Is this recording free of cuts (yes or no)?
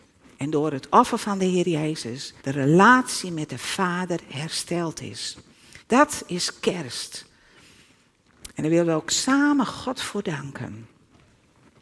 no